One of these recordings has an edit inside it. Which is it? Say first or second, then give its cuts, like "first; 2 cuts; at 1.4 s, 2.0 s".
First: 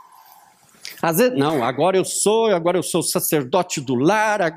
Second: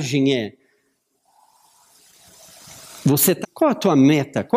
second; 1 cut; at 3.4 s